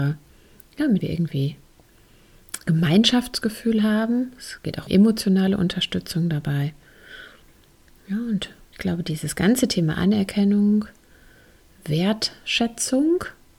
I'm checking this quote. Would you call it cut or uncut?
cut